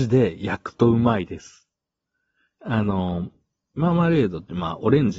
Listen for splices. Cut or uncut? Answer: uncut